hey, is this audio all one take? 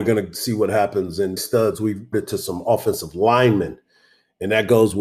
no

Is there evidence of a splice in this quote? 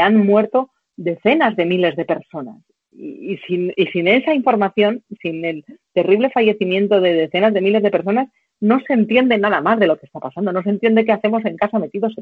yes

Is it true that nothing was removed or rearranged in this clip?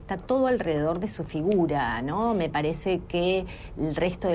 yes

